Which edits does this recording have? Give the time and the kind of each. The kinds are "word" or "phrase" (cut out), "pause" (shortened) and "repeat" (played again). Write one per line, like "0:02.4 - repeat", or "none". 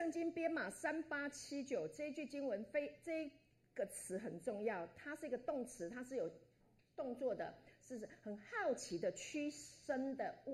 none